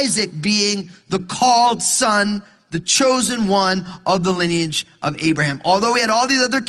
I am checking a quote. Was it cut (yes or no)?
no